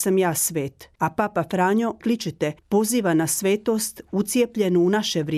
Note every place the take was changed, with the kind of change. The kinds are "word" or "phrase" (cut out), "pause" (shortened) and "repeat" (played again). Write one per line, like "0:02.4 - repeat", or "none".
0:00.9 - pause
0:02.0 - phrase
0:02.6 - pause